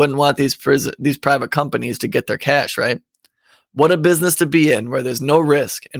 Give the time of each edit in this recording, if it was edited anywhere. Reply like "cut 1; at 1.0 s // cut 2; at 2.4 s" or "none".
none

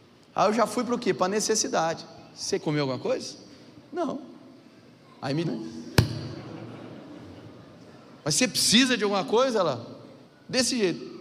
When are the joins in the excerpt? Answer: cut 1; at 2.6 s // cut 2; at 3.9 s // cut 3; at 5.4 s // cut 4; at 8.2 s // cut 5; at 10.2 s

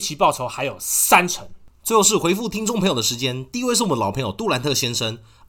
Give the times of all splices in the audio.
none

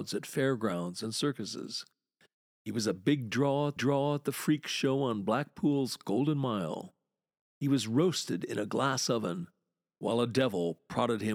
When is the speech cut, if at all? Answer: cut 1; at 3.8 s

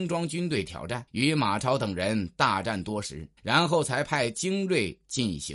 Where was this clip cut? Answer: cut 1; at 1.1 s // cut 2; at 3.4 s

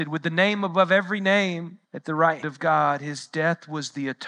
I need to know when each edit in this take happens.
cut 1; at 1.8 s // cut 2; at 2.4 s

